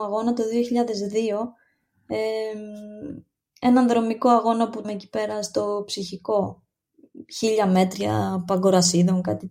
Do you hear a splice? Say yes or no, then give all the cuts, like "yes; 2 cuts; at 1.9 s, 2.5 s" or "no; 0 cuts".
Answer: yes; 1 cut; at 4.8 s